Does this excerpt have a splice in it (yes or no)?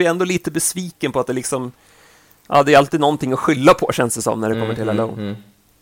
no